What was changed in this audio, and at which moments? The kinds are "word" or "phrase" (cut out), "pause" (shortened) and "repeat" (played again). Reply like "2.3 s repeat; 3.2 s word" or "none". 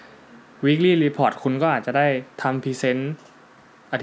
2.3 s pause